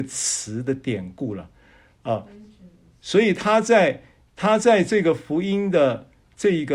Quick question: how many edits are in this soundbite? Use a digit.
0